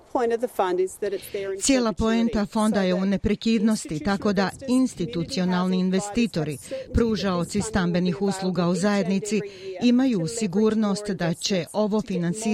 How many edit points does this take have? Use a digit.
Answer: 0